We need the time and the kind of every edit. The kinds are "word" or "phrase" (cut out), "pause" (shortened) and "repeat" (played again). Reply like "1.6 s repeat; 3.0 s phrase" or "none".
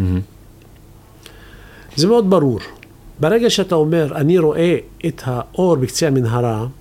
none